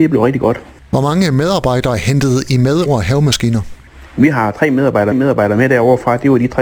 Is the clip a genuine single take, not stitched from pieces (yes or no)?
no